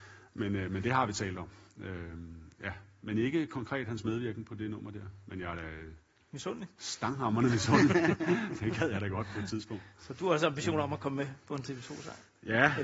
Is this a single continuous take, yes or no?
yes